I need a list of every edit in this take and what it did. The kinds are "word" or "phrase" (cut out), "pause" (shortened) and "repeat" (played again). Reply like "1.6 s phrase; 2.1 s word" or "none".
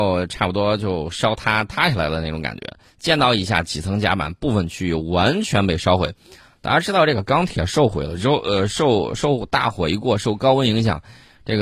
none

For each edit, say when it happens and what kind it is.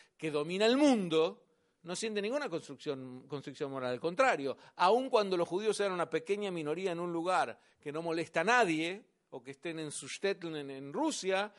none

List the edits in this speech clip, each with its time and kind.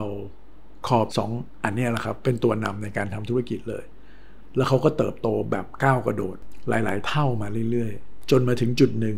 1.1 s word

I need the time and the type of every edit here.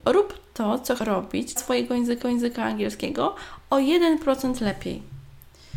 1.0 s word; 1.6 s word; 2.2 s repeat

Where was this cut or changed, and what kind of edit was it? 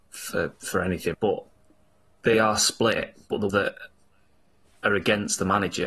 1.1 s word; 2.3 s phrase; 3.5 s word

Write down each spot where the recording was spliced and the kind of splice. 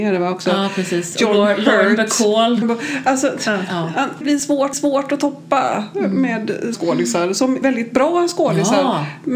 2.6 s word; 4.2 s word; 4.7 s repeat; 6.7 s word; 7.6 s word

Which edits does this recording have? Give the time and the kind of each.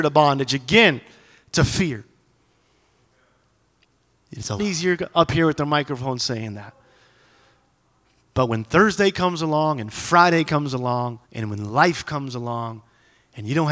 4.6 s word; 11.2 s pause

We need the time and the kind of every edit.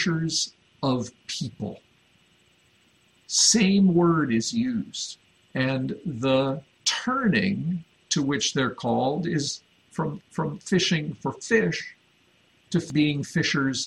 10.2 s repeat

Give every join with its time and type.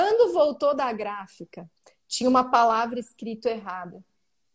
none

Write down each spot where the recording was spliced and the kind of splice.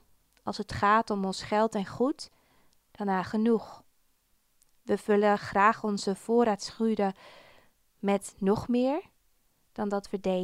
none

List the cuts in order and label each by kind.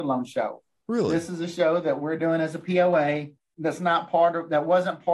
none

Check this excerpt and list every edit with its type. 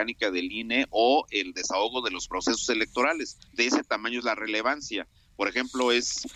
3.5 s pause

